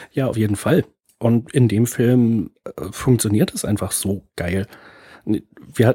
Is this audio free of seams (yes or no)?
yes